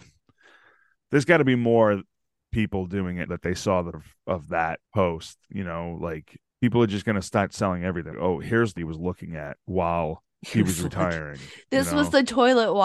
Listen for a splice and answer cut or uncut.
cut